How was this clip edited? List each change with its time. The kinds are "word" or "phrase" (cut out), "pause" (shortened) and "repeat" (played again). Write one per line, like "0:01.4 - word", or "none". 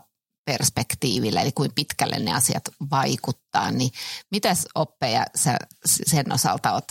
none